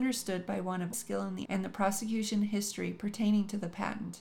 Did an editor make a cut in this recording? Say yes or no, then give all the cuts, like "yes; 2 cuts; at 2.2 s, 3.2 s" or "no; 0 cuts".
yes; 2 cuts; at 0.9 s, 1.4 s